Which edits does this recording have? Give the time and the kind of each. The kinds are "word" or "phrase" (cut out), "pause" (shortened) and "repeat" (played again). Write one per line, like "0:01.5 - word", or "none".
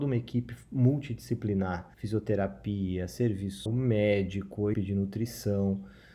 0:01.9 - pause
0:03.7 - word
0:04.7 - word